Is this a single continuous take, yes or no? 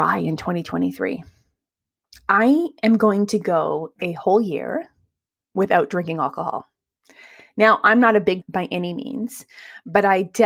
no